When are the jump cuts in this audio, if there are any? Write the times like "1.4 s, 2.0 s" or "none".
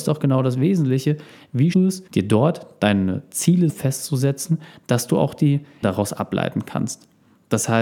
1.7 s, 2.1 s, 3.7 s, 5.8 s